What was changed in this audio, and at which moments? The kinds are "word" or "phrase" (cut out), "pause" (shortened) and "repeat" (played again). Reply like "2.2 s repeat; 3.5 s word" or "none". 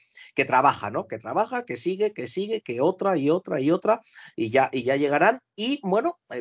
none